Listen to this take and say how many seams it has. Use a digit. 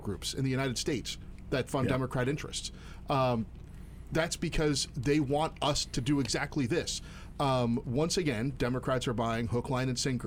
2